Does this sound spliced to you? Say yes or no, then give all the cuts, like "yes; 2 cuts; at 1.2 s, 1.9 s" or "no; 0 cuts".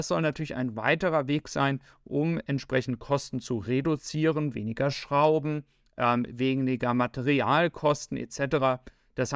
no; 0 cuts